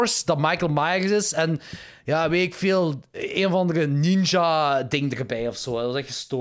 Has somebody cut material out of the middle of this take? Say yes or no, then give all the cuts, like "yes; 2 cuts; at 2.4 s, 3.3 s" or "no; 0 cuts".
no; 0 cuts